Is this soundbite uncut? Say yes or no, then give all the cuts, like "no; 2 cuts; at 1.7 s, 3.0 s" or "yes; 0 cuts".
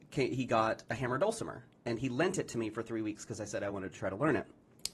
yes; 0 cuts